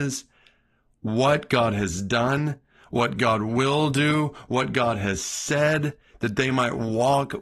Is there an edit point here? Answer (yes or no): no